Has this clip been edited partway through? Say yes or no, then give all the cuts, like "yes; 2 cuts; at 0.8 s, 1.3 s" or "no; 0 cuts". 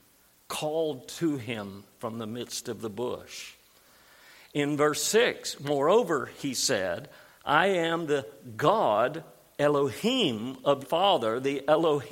yes; 1 cut; at 10.8 s